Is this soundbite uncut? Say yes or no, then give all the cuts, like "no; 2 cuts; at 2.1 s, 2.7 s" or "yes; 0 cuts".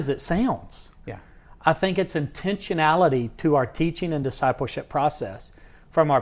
yes; 0 cuts